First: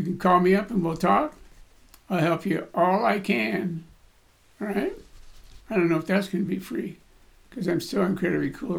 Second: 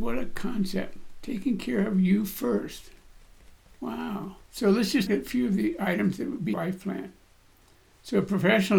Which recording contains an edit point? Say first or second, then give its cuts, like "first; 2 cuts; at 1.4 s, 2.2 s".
second; 3 cuts; at 4.4 s, 5.1 s, 6.5 s